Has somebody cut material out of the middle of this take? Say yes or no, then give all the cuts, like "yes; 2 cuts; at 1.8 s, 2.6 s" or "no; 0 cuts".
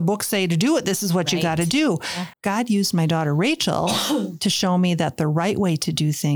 yes; 1 cut; at 2.3 s